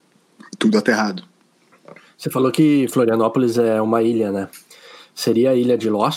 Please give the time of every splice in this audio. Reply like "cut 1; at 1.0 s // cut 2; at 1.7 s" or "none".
none